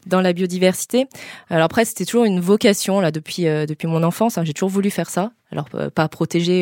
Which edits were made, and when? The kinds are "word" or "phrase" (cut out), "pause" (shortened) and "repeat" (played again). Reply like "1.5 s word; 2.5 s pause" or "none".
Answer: 5.4 s pause